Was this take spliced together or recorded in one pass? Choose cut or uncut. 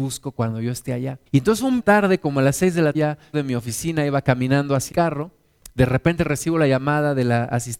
cut